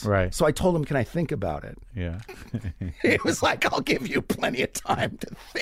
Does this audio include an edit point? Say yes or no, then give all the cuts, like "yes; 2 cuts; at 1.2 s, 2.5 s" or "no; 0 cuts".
no; 0 cuts